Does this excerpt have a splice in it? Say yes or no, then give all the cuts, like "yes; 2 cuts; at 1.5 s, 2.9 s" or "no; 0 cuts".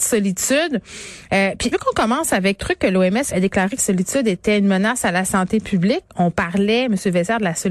yes; 4 cuts; at 1.7 s, 2.6 s, 3.3 s, 3.8 s